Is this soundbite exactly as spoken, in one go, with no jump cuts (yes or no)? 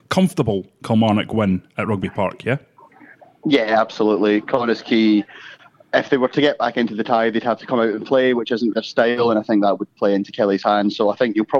no